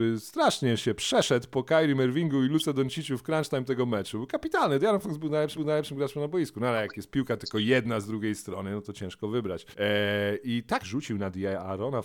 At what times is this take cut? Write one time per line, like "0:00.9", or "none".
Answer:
0:05.5
0:09.7
0:10.8